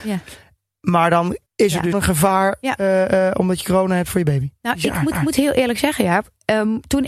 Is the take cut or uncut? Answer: cut